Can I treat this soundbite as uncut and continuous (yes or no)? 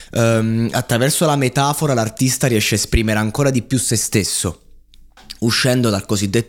yes